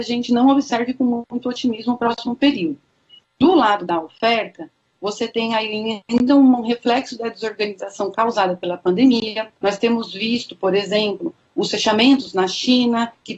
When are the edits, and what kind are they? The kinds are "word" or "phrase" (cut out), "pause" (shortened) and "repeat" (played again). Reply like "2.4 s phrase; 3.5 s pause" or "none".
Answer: 9.6 s pause